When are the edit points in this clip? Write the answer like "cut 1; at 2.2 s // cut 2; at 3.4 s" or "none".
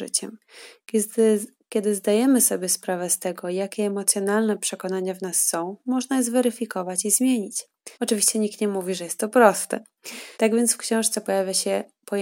cut 1; at 7.9 s // cut 2; at 10.3 s